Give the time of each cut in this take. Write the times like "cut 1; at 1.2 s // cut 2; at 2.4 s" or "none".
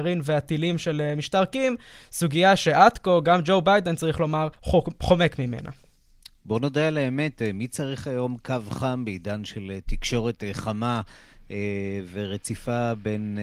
cut 1; at 4.5 s